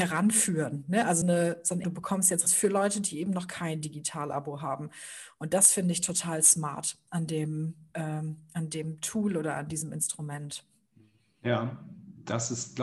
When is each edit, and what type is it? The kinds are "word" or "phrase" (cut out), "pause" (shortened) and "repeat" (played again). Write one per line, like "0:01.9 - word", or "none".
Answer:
0:01.2 - word
0:01.8 - phrase
0:02.5 - phrase